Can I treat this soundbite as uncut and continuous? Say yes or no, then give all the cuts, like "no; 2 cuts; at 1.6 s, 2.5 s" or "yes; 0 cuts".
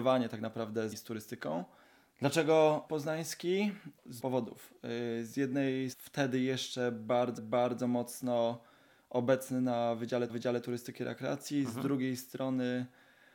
no; 6 cuts; at 0.9 s, 2.9 s, 4.2 s, 5.9 s, 7.4 s, 10.3 s